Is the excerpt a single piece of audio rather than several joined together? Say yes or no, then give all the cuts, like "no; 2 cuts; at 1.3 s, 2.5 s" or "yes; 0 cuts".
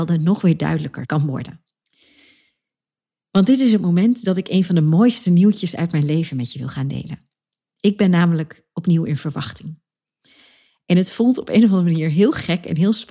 yes; 0 cuts